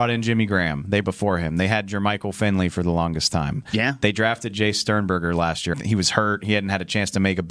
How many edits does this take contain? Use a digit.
2